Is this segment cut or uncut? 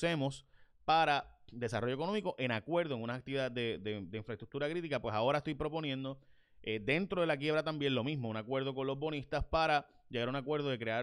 uncut